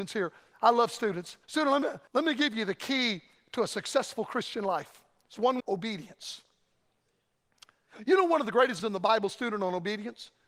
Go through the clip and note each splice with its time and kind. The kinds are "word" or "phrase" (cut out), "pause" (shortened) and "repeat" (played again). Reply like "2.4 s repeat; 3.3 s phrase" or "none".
1.4 s pause; 2.1 s pause; 5.6 s word; 8.8 s word